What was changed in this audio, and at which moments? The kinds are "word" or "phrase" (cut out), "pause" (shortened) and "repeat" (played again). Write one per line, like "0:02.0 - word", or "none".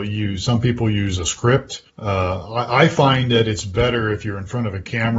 0:01.9 - pause